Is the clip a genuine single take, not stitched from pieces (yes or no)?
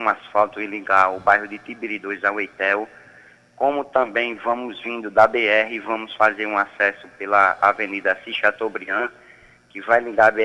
yes